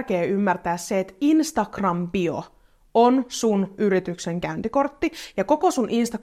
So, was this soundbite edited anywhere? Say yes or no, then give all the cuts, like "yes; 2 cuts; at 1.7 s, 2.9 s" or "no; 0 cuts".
no; 0 cuts